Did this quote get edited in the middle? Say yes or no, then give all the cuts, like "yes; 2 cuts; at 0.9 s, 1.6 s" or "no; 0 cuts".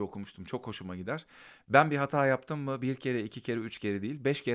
no; 0 cuts